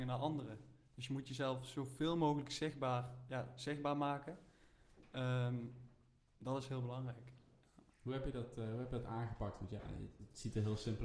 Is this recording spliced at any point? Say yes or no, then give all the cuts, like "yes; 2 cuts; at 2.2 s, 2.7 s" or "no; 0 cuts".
yes; 1 cut; at 3.3 s